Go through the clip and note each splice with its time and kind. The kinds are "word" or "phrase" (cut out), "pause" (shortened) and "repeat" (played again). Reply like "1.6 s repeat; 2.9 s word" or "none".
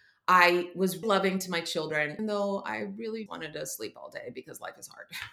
1.0 s word; 2.2 s word; 3.3 s word